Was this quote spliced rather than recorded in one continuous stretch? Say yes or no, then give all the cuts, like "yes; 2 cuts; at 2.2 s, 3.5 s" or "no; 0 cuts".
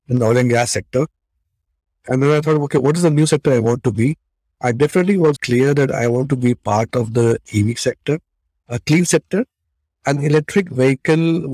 yes; 1 cut; at 5.4 s